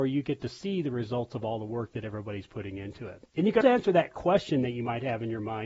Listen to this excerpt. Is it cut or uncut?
cut